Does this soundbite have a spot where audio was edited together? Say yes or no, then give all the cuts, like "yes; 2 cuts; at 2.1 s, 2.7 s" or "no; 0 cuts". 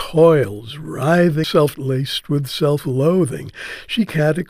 yes; 2 cuts; at 1.4 s, 1.7 s